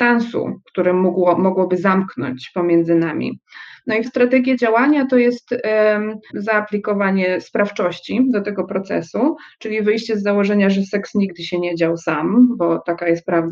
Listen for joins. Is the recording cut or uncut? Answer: cut